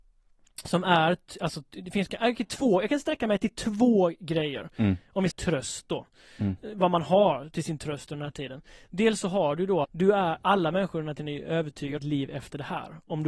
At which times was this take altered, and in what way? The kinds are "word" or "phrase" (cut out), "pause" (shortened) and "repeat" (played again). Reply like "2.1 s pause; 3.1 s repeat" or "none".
5.3 s word; 9.8 s word; 12.0 s word